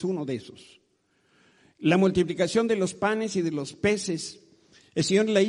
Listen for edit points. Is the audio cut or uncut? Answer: uncut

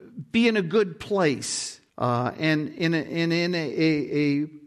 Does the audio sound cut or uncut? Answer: cut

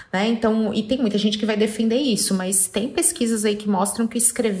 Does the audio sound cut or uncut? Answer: uncut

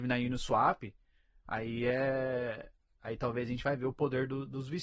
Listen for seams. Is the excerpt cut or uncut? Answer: uncut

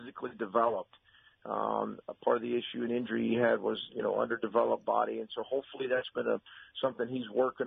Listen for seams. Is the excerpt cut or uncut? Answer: uncut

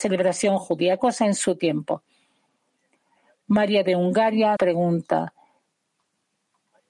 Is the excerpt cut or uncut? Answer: cut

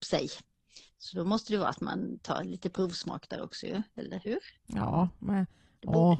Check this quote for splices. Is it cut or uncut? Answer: cut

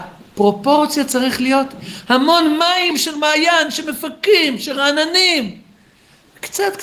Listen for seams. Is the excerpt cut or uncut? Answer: cut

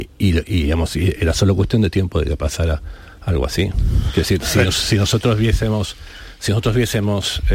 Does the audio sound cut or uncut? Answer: uncut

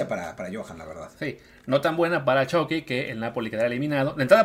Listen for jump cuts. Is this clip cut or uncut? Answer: uncut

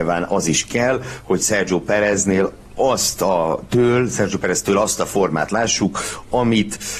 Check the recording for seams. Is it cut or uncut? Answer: uncut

